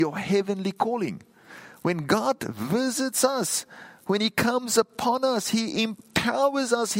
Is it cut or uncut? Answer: uncut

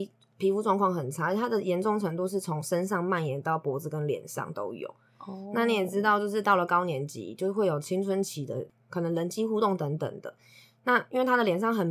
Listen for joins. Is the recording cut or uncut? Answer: uncut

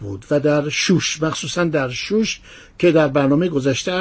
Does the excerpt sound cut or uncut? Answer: uncut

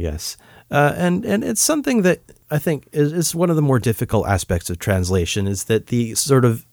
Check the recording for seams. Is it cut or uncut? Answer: uncut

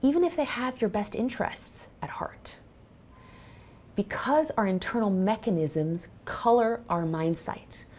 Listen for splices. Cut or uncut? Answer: uncut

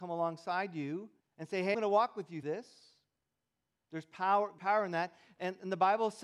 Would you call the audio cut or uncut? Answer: cut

